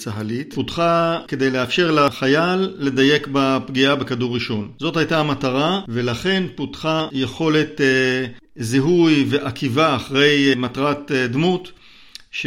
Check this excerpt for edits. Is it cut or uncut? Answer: uncut